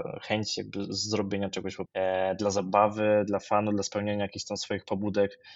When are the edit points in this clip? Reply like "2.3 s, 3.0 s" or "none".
1.9 s